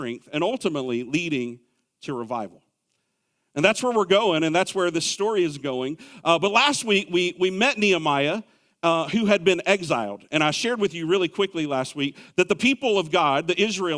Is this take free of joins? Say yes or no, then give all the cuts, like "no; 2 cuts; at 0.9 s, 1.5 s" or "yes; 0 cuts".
yes; 0 cuts